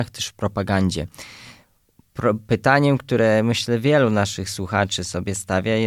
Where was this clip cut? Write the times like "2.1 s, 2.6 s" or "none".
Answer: none